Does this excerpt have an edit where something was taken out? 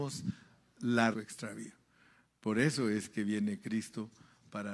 yes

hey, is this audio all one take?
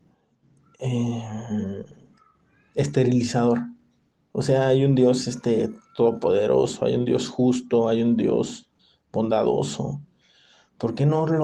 no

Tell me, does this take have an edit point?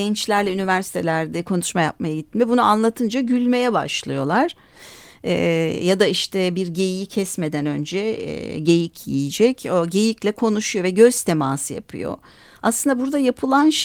no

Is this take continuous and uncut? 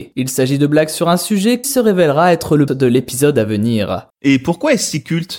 no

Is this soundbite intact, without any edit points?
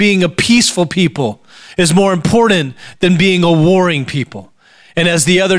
yes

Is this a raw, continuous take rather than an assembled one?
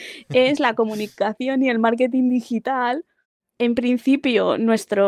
yes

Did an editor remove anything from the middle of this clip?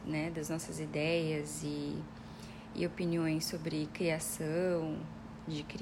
no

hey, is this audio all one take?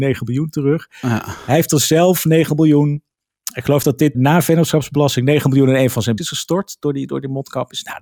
no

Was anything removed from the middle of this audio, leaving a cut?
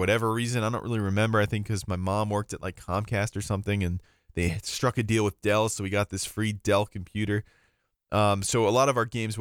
no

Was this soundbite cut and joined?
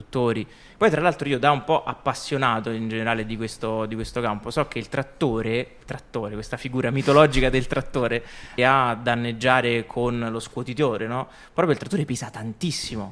yes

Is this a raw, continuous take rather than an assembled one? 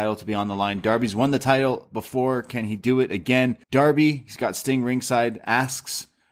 no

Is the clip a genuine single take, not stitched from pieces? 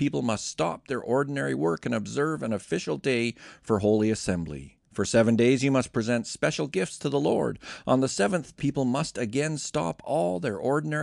no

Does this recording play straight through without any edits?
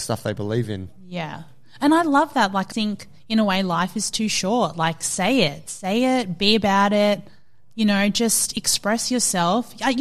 no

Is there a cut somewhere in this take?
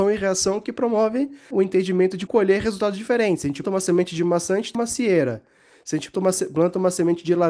yes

